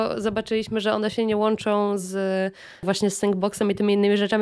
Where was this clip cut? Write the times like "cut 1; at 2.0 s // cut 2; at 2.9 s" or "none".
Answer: none